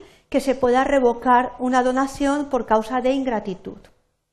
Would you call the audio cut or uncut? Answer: uncut